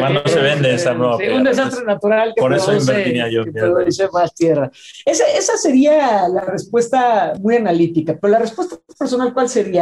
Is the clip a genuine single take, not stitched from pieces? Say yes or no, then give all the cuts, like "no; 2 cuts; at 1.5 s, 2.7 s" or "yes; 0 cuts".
yes; 0 cuts